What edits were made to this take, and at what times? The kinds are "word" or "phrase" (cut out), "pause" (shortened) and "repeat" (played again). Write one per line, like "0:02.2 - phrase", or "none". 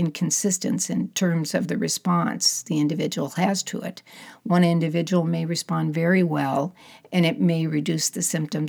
none

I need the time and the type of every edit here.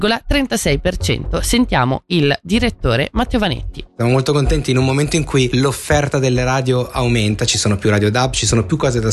none

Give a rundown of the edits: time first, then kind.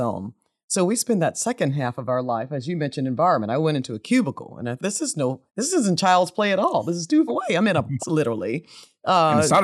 0:04.8 - word
0:05.5 - pause
0:07.3 - word
0:08.0 - word

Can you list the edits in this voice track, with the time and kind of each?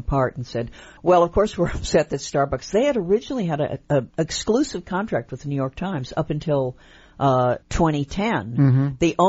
0:01.0 - pause
0:04.1 - pause
0:07.6 - pause

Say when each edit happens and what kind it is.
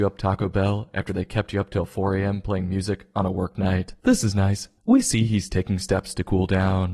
0:04.0 - pause
0:04.8 - pause

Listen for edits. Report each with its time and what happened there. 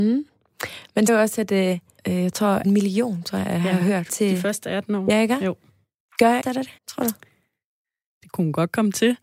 0:01.1 - word
0:02.0 - phrase
0:02.6 - word
0:04.1 - word
0:06.0 - pause
0:06.4 - word
0:06.8 - pause

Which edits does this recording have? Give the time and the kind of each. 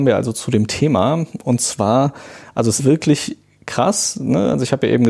0:02.8 - word

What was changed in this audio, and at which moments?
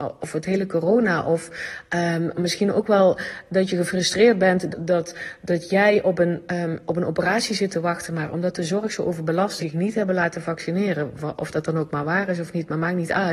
0:04.7 - word
0:09.6 - phrase

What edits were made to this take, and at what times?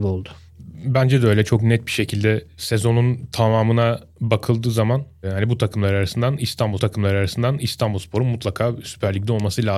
0:06.8 - repeat

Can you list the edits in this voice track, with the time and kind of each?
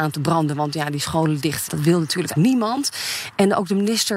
0:01.7 - word
0:02.3 - word

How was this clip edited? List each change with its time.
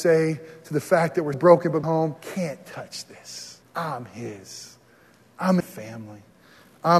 0:01.3 - word
0:01.8 - word
0:02.2 - pause
0:03.6 - pause
0:05.6 - phrase

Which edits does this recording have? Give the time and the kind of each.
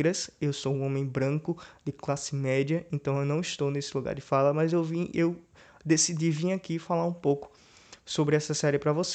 none

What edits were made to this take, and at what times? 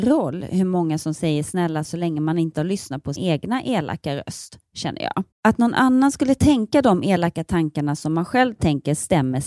0:01.8 - word
0:02.6 - word
0:03.2 - word
0:05.3 - pause

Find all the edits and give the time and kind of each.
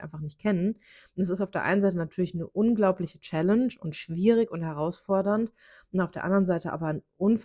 none

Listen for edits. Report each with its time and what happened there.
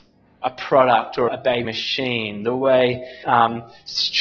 0:01.3 - word
0:01.6 - word
0:03.2 - word

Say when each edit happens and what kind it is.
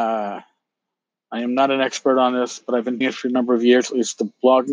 0:03.0 - word

